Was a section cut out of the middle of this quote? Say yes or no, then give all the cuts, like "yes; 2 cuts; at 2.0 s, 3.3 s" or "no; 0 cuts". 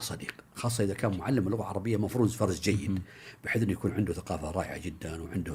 no; 0 cuts